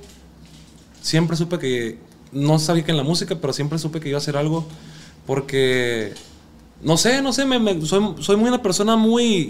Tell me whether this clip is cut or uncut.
uncut